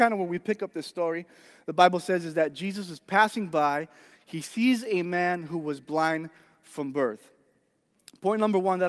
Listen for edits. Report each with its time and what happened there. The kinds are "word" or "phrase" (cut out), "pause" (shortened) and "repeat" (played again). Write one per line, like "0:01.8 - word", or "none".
none